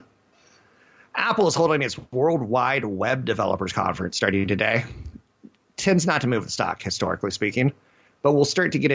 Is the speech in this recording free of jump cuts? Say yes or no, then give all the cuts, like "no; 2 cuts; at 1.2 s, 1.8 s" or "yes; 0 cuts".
yes; 0 cuts